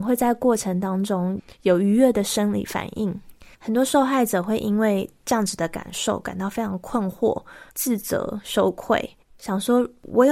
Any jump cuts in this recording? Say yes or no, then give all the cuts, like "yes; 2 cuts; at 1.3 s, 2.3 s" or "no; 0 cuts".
yes; 3 cuts; at 3.5 s, 7.7 s, 9.2 s